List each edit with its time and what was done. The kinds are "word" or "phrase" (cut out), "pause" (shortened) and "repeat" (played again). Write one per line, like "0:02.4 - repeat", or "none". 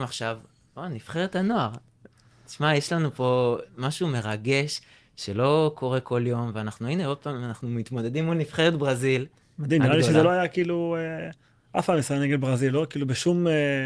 none